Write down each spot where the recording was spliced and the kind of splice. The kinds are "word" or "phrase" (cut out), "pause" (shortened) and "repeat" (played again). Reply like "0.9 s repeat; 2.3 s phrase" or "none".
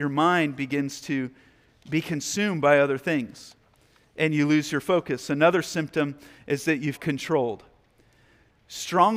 6.9 s word